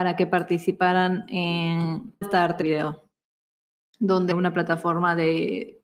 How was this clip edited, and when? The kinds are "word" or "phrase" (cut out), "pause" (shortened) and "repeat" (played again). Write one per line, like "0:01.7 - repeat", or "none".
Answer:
0:02.2 - word
0:02.6 - word
0:04.3 - phrase